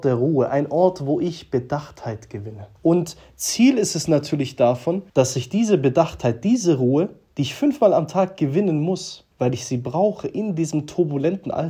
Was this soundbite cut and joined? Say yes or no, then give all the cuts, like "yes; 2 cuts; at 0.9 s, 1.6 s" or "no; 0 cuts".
yes; 3 cuts; at 2.8 s, 5.1 s, 9.3 s